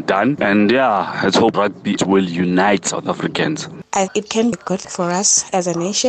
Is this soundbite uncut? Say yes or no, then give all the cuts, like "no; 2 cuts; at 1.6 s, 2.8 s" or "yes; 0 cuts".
no; 5 cuts; at 1.5 s, 2.0 s, 4.1 s, 4.5 s, 4.8 s